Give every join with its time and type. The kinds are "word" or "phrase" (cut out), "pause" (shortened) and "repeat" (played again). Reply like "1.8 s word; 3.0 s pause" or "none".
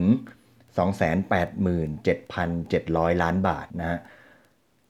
3.7 s pause